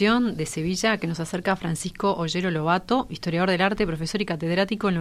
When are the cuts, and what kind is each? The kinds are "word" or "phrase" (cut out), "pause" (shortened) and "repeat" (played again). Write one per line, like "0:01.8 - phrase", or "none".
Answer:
none